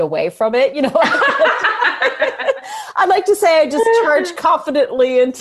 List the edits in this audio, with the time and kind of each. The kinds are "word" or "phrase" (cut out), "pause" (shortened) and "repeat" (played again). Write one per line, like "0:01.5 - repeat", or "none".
none